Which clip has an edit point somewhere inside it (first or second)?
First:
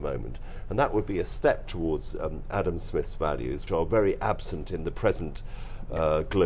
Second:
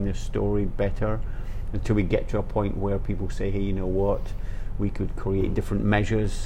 first